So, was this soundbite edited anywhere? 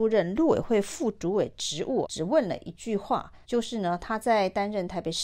yes; 2 cuts; at 2.0 s, 3.4 s

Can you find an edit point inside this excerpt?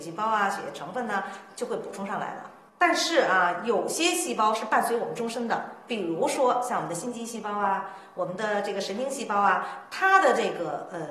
no; 0 cuts

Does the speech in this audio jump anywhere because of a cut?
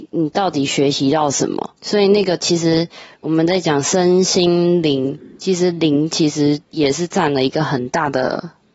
yes; 1 cut; at 1.8 s

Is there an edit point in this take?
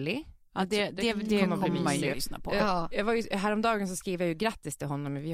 yes; 1 cut; at 2.1 s

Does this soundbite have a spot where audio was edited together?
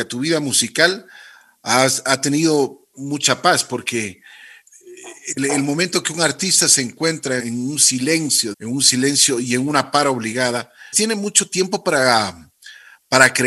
yes; 4 cuts; at 2.9 s, 7.4 s, 8.5 s, 10.9 s

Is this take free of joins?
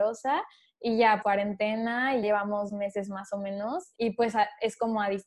no; 4 cuts; at 1.2 s, 2.2 s, 2.7 s, 4.0 s

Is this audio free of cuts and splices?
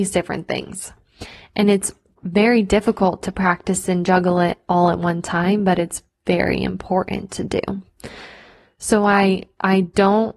yes; 0 cuts

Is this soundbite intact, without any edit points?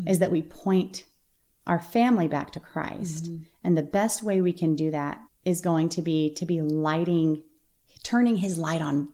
no; 1 cut; at 5.2 s

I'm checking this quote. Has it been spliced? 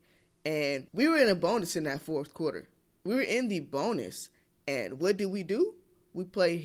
no; 0 cuts

